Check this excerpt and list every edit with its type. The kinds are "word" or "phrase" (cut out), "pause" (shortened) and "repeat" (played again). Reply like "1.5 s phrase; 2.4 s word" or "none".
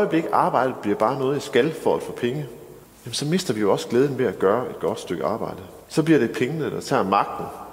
2.8 s pause; 5.8 s pause